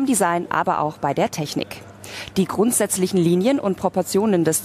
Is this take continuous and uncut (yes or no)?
yes